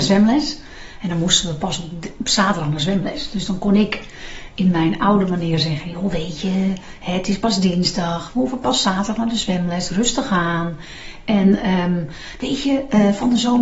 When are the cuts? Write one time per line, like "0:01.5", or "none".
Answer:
none